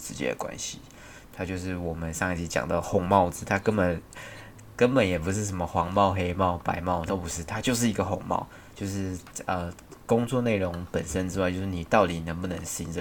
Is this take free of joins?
no; 1 cut; at 7.1 s

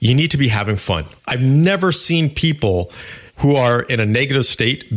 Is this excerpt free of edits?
no; 2 cuts; at 1.2 s, 3.3 s

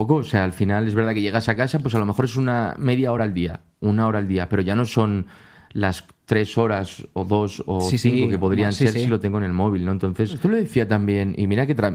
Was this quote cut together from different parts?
no; 0 cuts

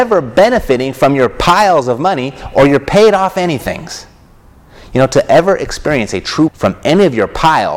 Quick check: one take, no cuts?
no; 1 cut; at 6.5 s

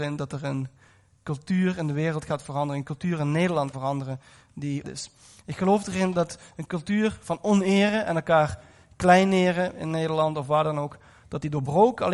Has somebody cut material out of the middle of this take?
yes; 2 cuts; at 3.7 s, 4.8 s

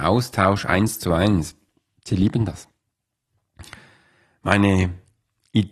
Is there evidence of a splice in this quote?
no; 0 cuts

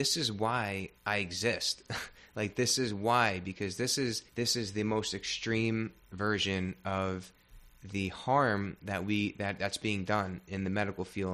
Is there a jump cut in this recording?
yes; 2 cuts; at 1.0 s, 4.3 s

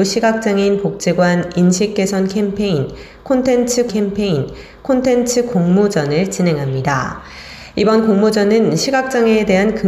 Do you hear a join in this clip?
yes; 1 cut; at 3.9 s

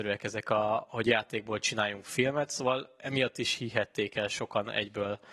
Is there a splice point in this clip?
no; 0 cuts

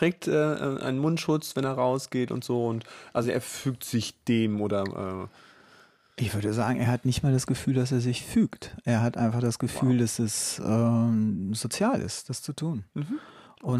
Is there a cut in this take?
no; 0 cuts

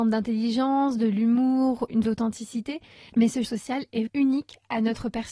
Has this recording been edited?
yes; 3 cuts; at 2.0 s, 3.4 s, 4.1 s

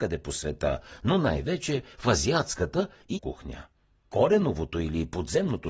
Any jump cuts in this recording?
yes; 1 cut; at 3.1 s

